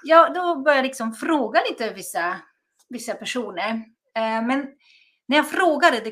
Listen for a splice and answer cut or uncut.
uncut